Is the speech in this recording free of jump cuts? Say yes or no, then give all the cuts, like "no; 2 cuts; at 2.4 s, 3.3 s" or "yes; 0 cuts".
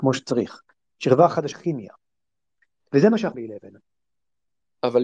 no; 2 cuts; at 1.5 s, 3.3 s